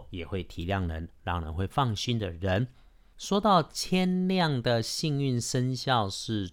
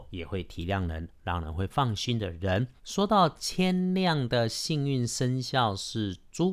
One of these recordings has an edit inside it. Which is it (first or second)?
second